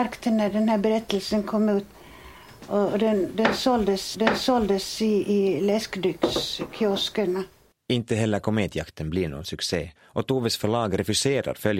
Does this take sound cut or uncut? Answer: cut